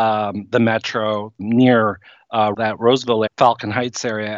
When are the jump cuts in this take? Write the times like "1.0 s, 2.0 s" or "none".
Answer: 1.4 s, 2.5 s, 3.3 s